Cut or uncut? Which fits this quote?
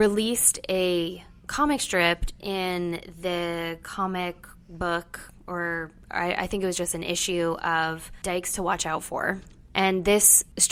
uncut